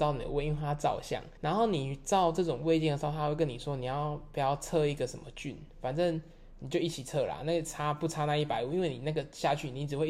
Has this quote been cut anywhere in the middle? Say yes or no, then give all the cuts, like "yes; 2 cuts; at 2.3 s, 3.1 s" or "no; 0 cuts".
yes; 1 cut; at 1.4 s